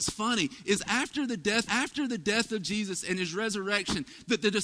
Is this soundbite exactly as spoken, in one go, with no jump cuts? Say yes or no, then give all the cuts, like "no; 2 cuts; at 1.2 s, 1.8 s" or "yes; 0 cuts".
no; 1 cut; at 1.7 s